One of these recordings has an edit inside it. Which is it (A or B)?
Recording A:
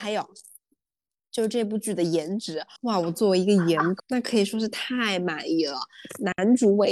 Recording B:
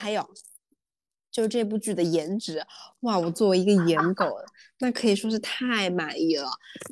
A